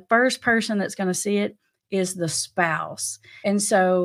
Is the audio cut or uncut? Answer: uncut